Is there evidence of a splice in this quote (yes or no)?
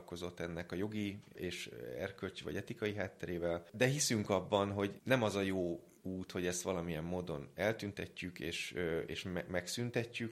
yes